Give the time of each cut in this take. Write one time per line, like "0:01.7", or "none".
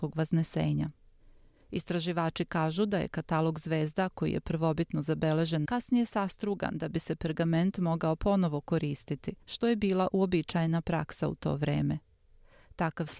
0:05.6
0:09.4